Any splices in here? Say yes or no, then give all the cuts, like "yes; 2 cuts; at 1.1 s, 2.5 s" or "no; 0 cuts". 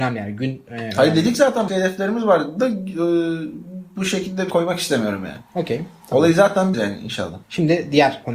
yes; 3 cuts; at 1.7 s, 4.5 s, 6.7 s